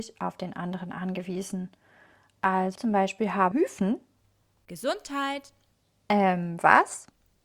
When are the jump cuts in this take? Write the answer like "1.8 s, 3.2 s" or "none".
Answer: 2.8 s, 3.5 s